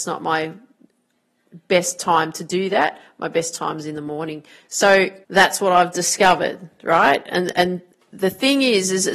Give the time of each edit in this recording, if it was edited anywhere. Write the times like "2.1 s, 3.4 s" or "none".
5.2 s